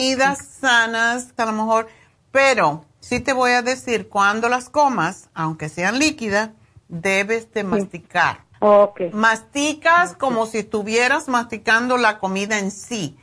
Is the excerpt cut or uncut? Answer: cut